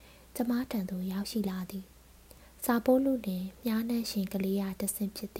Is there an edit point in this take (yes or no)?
no